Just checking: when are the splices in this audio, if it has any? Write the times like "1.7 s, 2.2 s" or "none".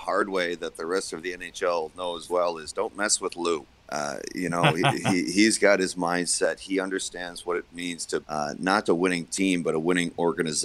2.3 s, 3.8 s, 8.2 s, 8.8 s